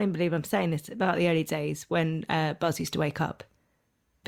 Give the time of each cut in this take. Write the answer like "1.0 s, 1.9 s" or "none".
none